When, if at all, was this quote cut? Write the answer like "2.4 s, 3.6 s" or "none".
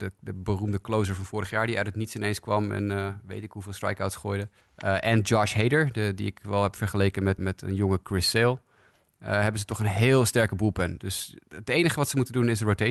4.6 s, 7.4 s

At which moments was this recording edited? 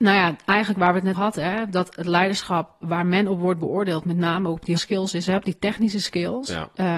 1.1 s, 4.8 s

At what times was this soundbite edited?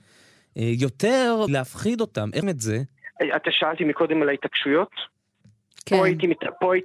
1.5 s, 2.4 s, 3.8 s

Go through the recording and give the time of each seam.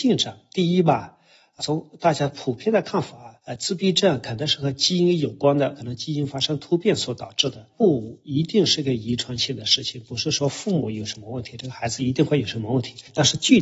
1.6 s, 3.4 s

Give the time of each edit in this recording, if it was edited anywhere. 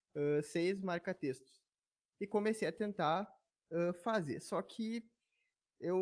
none

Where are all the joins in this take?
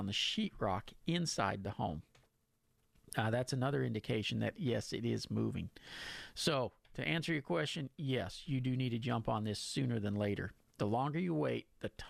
8.4 s

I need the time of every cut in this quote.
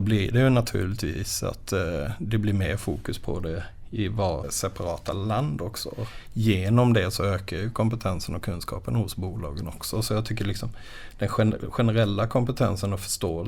none

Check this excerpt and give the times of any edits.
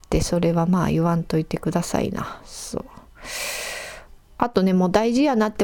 4.2 s

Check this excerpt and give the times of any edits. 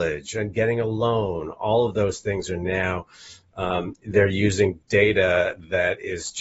none

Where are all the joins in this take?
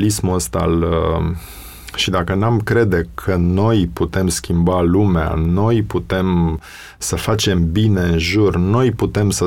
none

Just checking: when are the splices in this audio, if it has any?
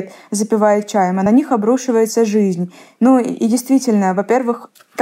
none

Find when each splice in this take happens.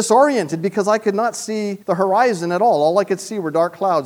1.8 s

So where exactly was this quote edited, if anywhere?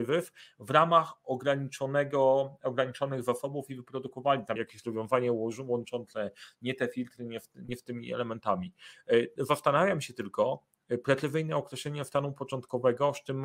4.6 s

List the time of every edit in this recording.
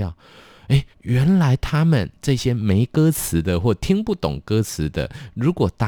0.9 s

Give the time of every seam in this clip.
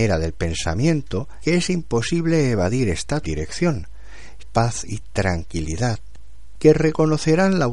1.4 s, 3.2 s, 4.4 s

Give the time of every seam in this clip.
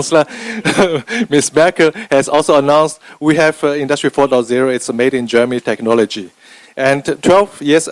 none

